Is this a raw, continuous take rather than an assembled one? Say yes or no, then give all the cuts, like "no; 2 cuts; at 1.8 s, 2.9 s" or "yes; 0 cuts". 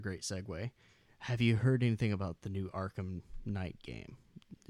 yes; 0 cuts